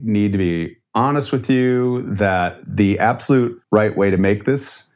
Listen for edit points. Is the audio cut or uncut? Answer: cut